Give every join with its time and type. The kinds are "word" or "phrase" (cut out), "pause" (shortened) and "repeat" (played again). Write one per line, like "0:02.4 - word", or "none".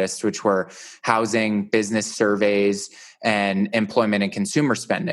none